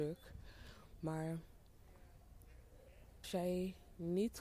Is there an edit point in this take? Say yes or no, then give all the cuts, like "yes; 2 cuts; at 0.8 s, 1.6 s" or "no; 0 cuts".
yes; 1 cut; at 3.2 s